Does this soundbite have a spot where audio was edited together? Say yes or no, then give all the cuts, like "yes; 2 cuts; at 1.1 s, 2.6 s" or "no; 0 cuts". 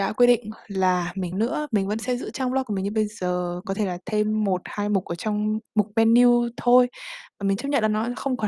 yes; 2 cuts; at 1.3 s, 5.7 s